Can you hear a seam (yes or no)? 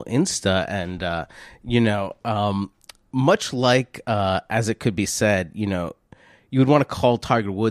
no